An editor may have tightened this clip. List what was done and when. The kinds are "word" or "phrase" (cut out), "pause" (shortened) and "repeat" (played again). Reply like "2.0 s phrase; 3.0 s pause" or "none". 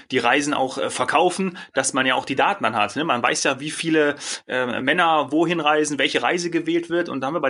none